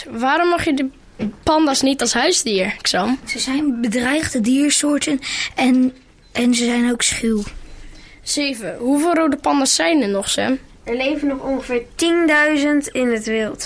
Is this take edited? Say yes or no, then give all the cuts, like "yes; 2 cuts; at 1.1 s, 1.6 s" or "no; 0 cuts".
no; 0 cuts